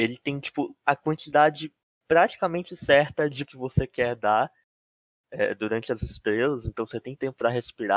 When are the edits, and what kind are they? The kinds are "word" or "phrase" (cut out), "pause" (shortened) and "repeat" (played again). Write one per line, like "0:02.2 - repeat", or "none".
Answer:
0:03.5 - word